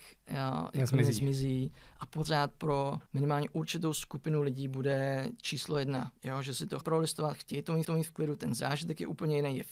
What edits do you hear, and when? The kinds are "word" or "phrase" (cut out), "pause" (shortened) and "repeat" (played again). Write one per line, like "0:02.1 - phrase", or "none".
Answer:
0:03.1 - pause
0:06.2 - pause
0:06.8 - word
0:07.8 - repeat